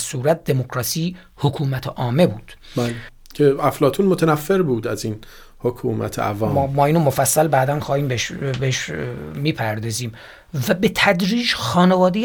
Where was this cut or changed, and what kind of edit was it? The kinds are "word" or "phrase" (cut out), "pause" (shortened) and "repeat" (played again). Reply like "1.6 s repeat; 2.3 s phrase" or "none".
none